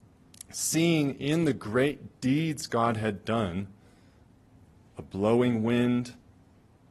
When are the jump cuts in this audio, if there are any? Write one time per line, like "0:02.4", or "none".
none